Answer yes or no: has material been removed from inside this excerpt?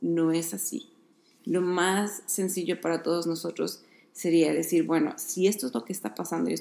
no